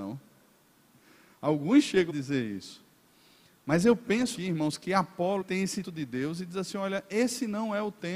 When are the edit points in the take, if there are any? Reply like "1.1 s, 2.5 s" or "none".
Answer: 2.1 s, 4.4 s, 5.4 s, 5.8 s